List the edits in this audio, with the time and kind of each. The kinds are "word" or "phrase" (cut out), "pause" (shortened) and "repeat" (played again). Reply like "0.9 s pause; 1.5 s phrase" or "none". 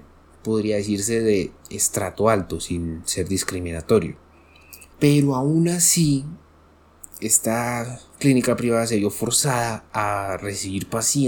4.9 s pause

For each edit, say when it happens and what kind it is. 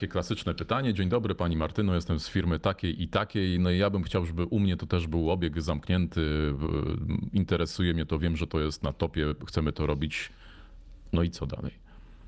none

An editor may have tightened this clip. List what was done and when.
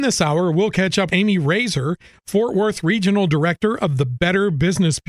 1.1 s word

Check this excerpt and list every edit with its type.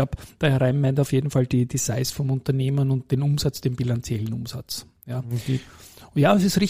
none

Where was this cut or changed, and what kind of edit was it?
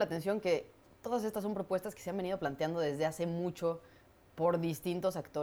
none

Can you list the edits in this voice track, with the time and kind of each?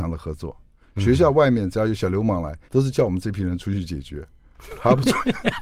2.7 s pause

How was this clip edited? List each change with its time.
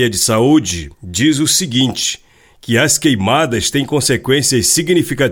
0.9 s pause

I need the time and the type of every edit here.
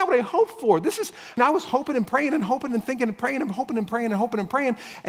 1.4 s word

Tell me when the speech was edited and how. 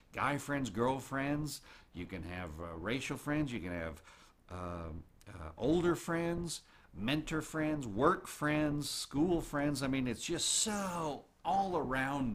none

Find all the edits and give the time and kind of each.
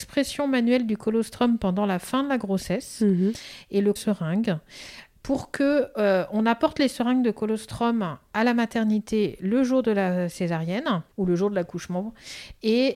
4.0 s phrase; 11.1 s pause

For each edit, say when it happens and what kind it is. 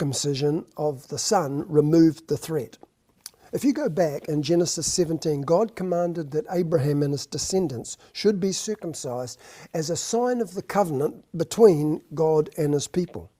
none

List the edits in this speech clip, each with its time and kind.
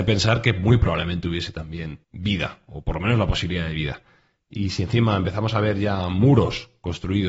2.0 s pause

